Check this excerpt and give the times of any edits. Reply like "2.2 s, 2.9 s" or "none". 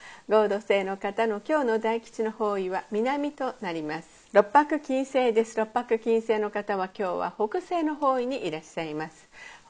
4.2 s